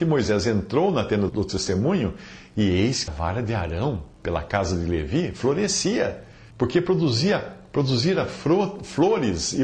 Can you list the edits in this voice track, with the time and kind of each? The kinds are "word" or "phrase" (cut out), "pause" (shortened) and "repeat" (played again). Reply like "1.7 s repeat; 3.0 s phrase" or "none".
1.3 s word; 3.1 s word; 6.5 s pause